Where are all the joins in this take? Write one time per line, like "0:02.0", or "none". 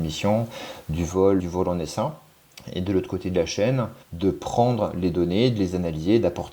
0:01.4
0:04.0